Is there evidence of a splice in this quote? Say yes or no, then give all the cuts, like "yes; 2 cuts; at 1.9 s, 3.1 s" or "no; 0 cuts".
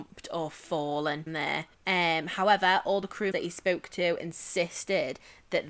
yes; 3 cuts; at 1.3 s, 1.7 s, 3.3 s